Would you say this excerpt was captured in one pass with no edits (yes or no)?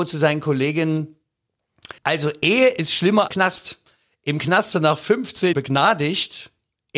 no